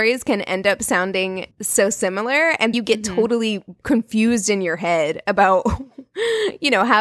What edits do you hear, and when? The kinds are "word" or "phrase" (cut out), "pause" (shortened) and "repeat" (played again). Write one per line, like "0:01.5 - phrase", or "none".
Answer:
0:01.5 - pause
0:02.7 - word